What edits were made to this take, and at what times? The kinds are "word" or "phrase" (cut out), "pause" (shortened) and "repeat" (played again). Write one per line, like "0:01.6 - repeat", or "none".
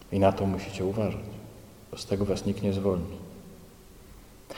none